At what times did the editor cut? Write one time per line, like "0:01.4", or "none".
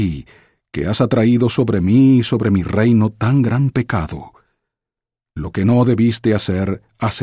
none

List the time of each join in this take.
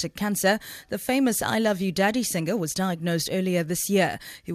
none

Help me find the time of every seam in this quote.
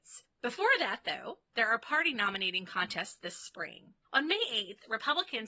none

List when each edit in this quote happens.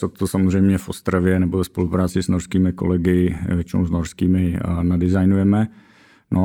none

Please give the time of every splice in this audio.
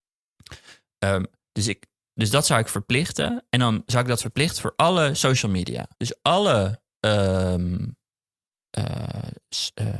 0:05.9

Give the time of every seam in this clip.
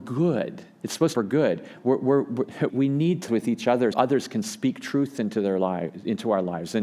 0:01.1
0:02.7
0:03.3
0:03.9

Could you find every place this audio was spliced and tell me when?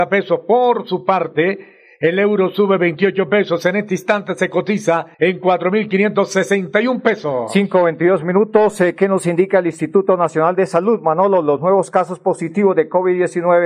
0:05.1

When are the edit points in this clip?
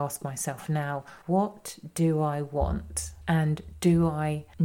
0:01.2

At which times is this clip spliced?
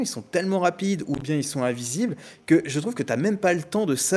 none

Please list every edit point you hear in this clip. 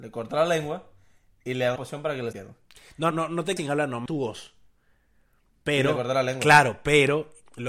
0:01.8
0:02.3
0:03.1
0:03.6
0:04.1

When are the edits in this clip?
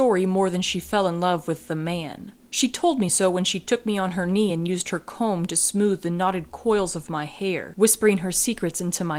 none

